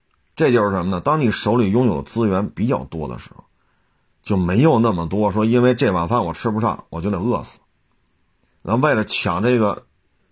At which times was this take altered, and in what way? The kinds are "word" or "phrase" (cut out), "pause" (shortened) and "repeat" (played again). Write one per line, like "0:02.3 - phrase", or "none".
none

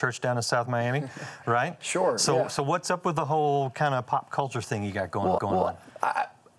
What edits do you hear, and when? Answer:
0:05.4 - repeat

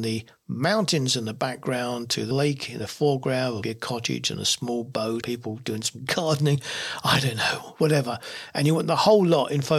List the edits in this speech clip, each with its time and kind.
0:02.3 - word
0:03.6 - word
0:05.2 - word

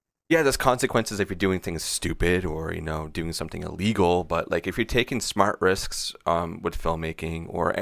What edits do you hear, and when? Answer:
none

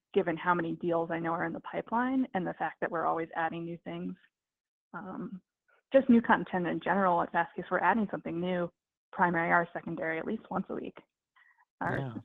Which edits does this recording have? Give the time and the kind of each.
none

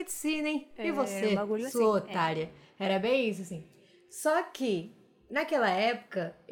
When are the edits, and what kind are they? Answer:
none

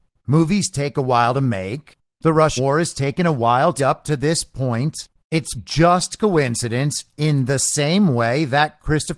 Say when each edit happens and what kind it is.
0:02.6 - word
0:03.8 - word
0:05.5 - word

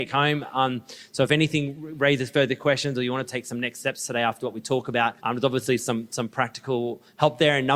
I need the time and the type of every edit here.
0:05.2 - pause

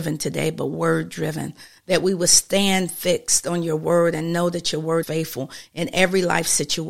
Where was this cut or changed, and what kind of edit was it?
0:05.0 - word

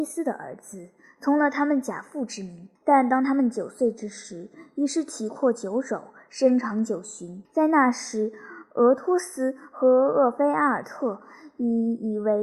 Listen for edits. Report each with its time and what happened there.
0:02.8 - pause
0:07.4 - pause

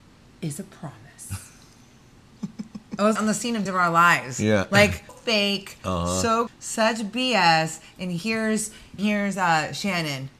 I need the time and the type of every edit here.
0:03.2 - word
0:03.7 - word
0:05.1 - word
0:06.5 - word
0:09.0 - word

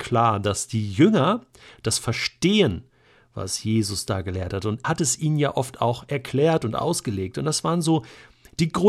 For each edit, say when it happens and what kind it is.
0:04.8 - word

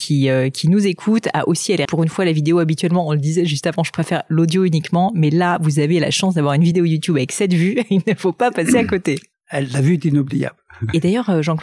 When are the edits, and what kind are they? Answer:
0:01.8 - word

